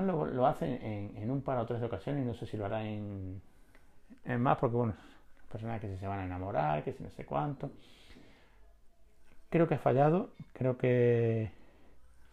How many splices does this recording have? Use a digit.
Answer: 0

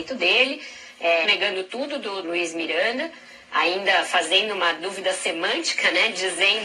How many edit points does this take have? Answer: 2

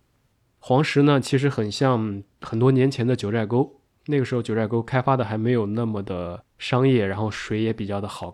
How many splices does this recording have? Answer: 1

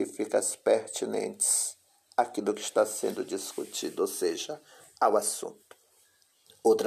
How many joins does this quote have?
0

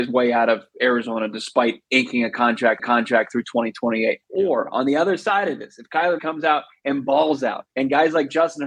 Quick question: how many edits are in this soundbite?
4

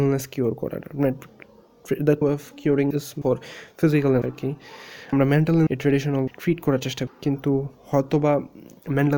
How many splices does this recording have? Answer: 8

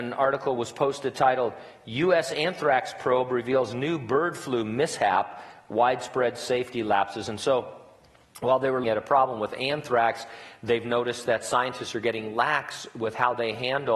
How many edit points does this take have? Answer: 1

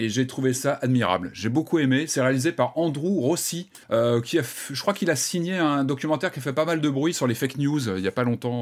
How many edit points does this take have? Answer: 1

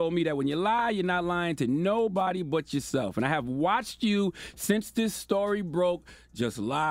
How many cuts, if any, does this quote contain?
0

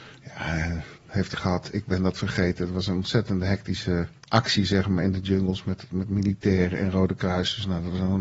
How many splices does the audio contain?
3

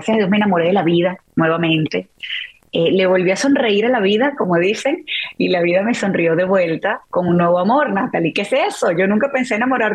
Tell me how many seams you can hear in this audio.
0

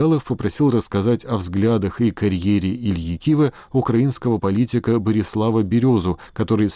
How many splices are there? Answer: 0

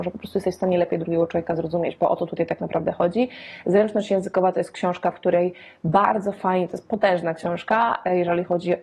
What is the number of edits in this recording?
0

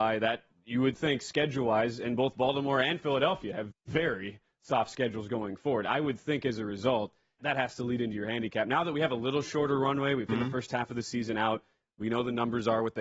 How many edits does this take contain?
3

